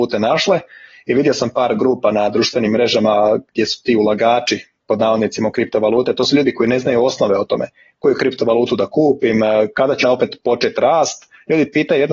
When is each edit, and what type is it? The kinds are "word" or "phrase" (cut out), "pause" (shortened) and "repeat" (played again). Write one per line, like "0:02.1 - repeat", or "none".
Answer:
0:10.0 - word